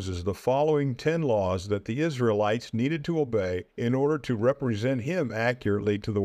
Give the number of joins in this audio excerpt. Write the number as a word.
one